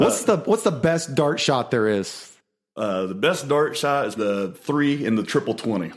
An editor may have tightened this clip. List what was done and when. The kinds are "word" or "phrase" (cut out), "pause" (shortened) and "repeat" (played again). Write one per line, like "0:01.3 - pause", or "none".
0:04.2 - word